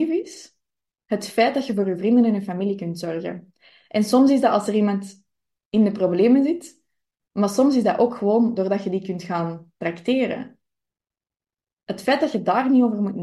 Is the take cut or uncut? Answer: uncut